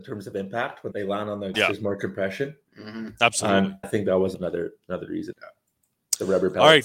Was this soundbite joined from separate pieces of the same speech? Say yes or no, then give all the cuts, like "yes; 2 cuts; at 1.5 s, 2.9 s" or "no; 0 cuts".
yes; 5 cuts; at 0.9 s, 1.5 s, 3.8 s, 4.3 s, 5.3 s